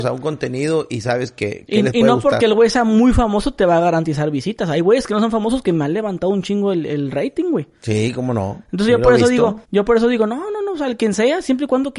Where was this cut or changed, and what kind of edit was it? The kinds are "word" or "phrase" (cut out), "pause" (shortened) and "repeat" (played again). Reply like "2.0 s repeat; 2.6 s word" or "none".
9.6 s pause